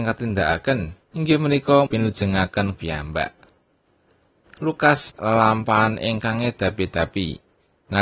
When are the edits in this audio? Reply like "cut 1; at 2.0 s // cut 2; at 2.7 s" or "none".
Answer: cut 1; at 1.0 s // cut 2; at 1.9 s // cut 3; at 2.7 s // cut 4; at 5.1 s

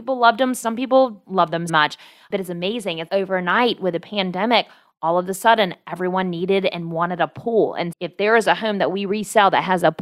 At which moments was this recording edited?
cut 1; at 1.2 s // cut 2; at 1.7 s // cut 3; at 3.1 s // cut 4; at 7.9 s

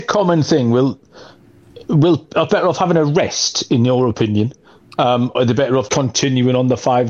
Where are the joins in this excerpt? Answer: cut 1; at 2.5 s // cut 2; at 5.3 s // cut 3; at 5.9 s

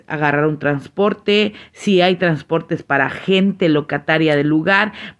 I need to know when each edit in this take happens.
none

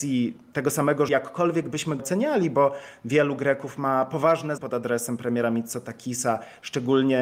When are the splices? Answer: cut 1; at 1.1 s // cut 2; at 2.0 s // cut 3; at 4.6 s

